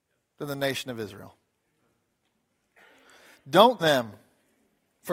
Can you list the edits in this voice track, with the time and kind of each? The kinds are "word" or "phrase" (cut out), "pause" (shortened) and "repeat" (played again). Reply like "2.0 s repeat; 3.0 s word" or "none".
3.8 s word